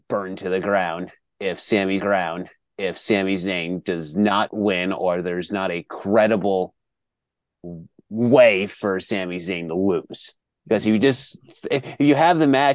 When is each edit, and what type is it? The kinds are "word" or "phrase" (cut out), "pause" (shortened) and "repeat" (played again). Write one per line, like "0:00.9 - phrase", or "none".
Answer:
0:02.0 - repeat
0:10.4 - pause